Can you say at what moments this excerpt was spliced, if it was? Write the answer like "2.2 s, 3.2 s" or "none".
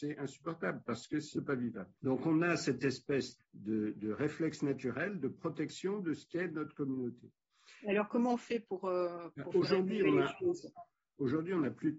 1.3 s, 2.0 s, 3.4 s

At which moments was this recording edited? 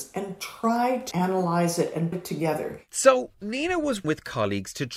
1.1 s, 2.1 s, 2.9 s, 4.0 s

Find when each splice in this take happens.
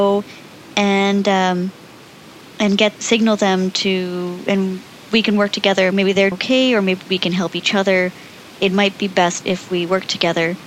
3.0 s, 6.3 s, 7.1 s, 9.4 s

